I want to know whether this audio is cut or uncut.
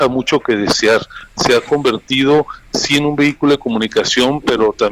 uncut